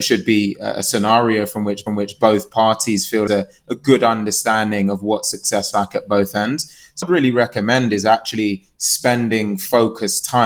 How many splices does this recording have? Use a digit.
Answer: 4